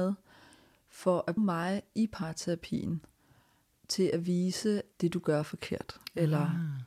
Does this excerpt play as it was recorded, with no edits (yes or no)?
no